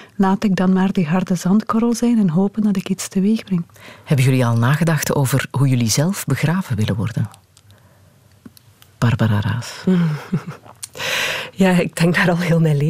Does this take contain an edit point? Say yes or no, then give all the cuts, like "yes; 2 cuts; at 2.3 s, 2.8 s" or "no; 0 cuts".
no; 0 cuts